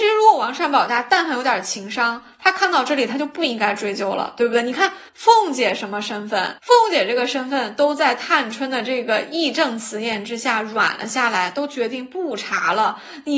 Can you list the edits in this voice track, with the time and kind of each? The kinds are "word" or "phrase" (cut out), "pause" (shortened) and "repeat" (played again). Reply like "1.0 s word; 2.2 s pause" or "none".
5.1 s pause; 6.6 s pause